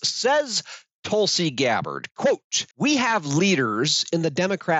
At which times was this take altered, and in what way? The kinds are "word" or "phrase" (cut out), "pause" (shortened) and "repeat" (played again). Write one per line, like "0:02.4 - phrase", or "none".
0:02.7 - pause

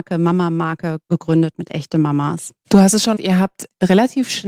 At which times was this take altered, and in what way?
0:03.2 - word

